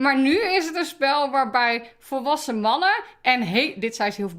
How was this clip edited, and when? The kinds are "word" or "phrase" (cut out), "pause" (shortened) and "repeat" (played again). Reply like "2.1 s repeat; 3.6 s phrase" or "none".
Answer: none